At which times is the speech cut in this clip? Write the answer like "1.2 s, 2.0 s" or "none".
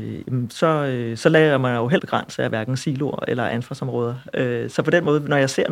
2.0 s